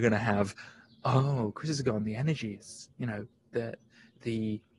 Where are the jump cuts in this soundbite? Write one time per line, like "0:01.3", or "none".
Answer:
none